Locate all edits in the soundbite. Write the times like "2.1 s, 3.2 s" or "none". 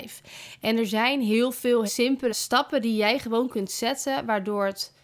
1.9 s, 2.3 s